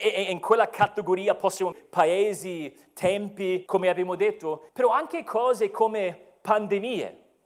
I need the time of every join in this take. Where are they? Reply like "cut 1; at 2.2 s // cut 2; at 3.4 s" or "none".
cut 1; at 1.7 s // cut 2; at 3.7 s // cut 3; at 4.7 s